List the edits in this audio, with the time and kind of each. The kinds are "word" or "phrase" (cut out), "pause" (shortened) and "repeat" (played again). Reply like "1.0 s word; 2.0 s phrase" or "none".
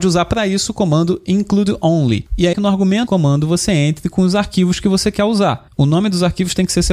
2.5 s phrase; 3.1 s word

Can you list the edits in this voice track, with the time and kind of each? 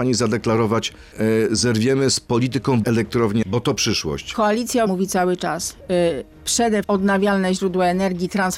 1.1 s word; 2.8 s word; 3.4 s word; 4.9 s word; 6.8 s word

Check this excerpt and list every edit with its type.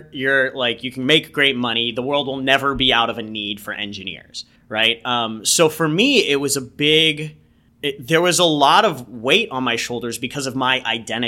4.6 s pause; 7.7 s pause

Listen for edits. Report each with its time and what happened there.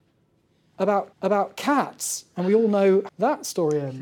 1.1 s repeat; 3.1 s word

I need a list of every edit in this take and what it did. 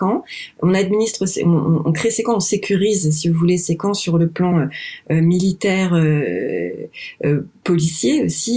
none

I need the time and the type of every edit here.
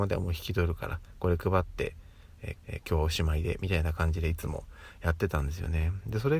2.6 s repeat

